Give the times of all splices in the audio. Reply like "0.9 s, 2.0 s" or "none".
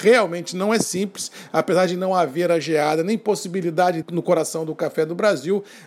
4.0 s